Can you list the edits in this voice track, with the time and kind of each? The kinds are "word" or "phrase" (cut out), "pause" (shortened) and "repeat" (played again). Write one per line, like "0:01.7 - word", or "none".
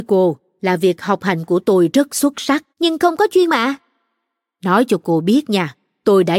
0:02.7 - pause
0:03.5 - word